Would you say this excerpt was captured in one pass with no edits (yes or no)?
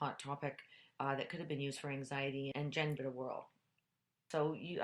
no